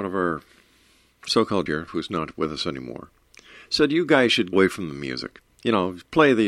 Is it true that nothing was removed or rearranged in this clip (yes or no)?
no